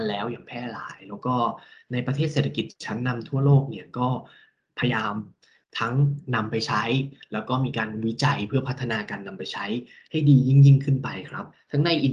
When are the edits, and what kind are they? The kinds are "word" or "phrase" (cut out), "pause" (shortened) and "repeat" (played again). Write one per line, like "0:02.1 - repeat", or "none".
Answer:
none